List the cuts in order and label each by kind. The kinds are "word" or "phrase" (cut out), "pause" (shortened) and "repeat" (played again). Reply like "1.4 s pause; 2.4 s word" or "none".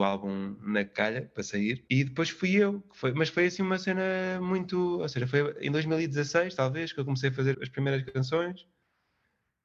1.9 s pause; 7.5 s word